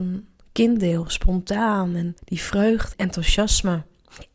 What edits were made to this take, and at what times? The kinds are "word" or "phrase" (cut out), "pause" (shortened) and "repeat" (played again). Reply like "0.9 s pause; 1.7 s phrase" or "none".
2.2 s pause; 2.9 s word